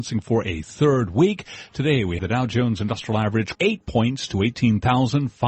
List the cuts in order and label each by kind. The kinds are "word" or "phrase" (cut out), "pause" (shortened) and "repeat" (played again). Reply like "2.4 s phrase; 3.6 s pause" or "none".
2.2 s word; 3.5 s word

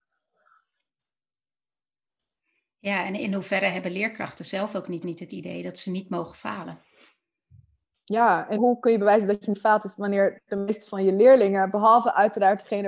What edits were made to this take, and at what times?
5.0 s repeat; 8.5 s word

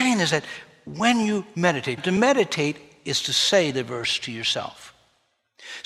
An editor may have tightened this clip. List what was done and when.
2.0 s word

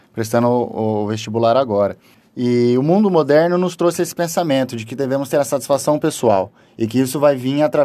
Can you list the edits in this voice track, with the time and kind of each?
2.1 s pause

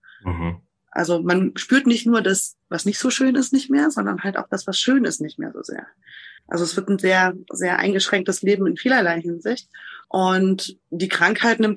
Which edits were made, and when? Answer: 2.6 s pause; 6.4 s pause; 10.0 s pause

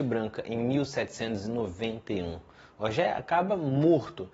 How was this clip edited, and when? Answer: none

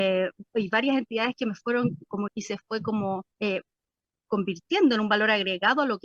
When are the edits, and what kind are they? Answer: 2.3 s word; 3.3 s pause

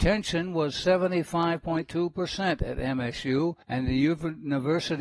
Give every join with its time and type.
3.6 s pause

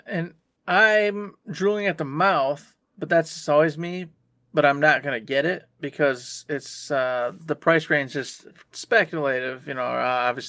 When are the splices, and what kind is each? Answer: none

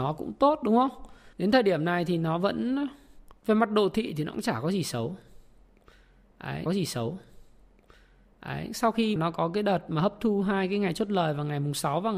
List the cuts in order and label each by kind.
1.3 s pause; 3.4 s pause; 6.7 s repeat; 9.2 s word

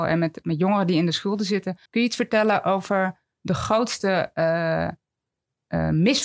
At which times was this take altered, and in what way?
1.9 s pause

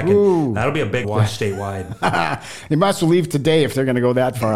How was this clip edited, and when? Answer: 1.0 s word

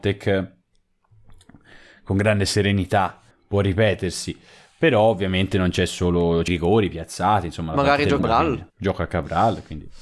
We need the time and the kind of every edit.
3.3 s pause; 6.5 s phrase; 8.2 s word; 8.7 s pause

